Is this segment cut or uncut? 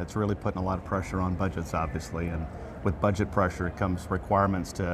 uncut